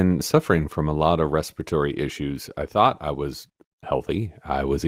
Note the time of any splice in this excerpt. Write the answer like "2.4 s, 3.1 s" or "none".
none